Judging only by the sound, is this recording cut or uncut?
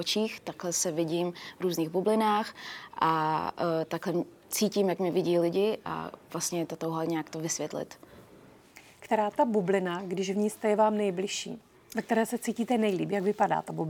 uncut